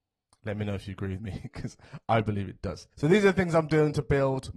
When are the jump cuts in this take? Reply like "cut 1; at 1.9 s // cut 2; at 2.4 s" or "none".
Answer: cut 1; at 2.9 s